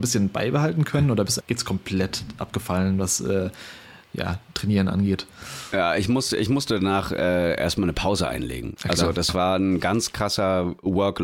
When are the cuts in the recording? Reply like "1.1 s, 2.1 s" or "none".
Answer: 1.4 s